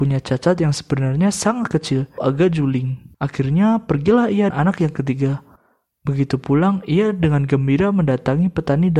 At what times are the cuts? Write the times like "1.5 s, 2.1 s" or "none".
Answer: 2.2 s, 3.1 s, 4.5 s